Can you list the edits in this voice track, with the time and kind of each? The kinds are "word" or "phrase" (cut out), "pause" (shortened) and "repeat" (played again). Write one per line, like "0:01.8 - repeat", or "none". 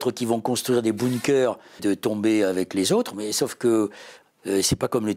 0:01.8 - phrase